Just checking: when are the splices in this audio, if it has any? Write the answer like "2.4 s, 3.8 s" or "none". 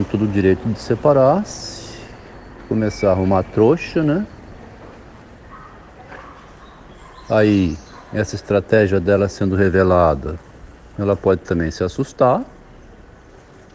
none